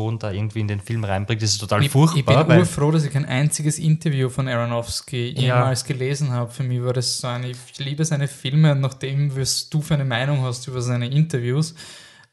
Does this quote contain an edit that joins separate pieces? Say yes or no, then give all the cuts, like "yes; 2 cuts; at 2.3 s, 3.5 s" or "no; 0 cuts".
no; 0 cuts